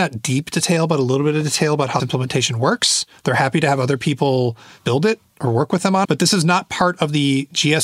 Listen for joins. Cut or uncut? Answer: cut